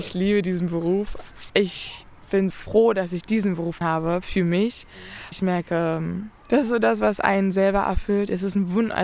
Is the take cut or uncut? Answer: cut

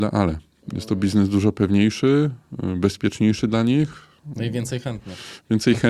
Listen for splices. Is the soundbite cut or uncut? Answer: uncut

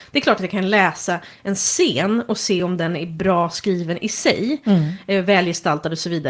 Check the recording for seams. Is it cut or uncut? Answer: uncut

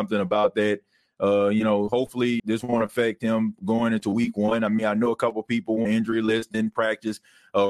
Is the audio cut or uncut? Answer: cut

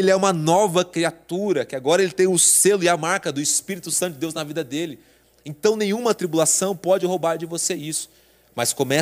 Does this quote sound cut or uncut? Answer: uncut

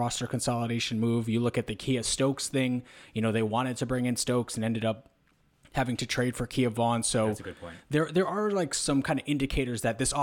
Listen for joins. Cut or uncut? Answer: uncut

